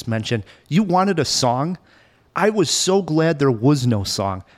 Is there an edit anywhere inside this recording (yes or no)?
no